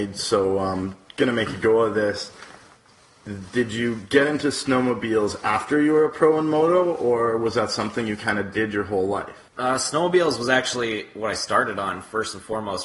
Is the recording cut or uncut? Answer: cut